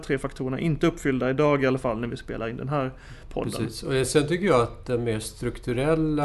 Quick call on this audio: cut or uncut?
uncut